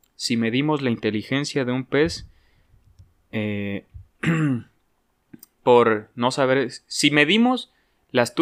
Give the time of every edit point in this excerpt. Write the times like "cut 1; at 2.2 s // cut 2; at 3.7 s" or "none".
none